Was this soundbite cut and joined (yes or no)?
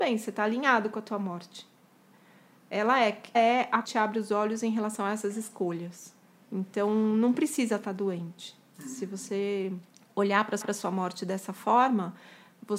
yes